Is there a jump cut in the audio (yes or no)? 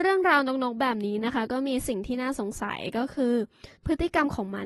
yes